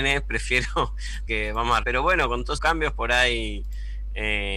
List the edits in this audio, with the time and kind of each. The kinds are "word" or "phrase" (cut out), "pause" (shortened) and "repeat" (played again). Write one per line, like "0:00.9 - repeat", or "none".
0:01.3 - word
0:01.8 - word
0:02.6 - word